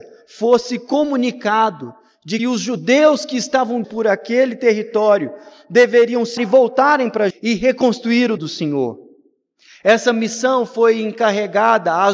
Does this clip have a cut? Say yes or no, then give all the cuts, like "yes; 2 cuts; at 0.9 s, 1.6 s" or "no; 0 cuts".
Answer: yes; 5 cuts; at 2.4 s, 3.8 s, 6.4 s, 7.3 s, 8.4 s